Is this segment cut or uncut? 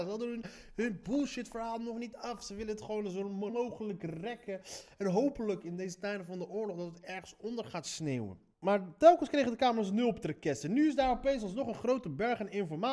cut